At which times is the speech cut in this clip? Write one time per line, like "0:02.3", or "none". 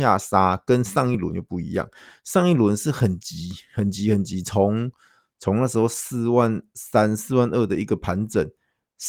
none